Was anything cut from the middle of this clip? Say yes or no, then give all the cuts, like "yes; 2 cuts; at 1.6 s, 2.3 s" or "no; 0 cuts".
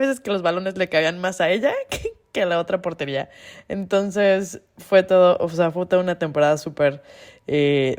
no; 0 cuts